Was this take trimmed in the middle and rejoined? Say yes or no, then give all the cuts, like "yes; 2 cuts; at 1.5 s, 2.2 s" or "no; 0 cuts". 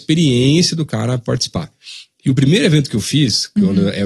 no; 0 cuts